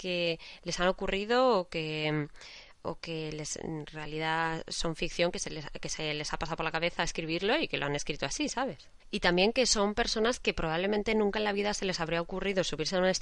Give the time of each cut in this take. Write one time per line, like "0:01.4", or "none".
0:09.0